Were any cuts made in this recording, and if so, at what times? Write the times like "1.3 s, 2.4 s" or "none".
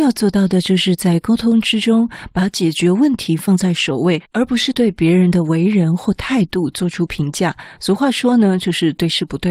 4.2 s